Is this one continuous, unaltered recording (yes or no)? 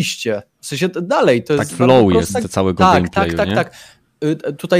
no